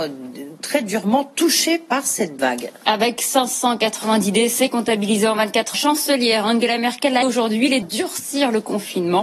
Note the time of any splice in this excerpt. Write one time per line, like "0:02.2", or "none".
0:02.4
0:05.7
0:07.2
0:07.8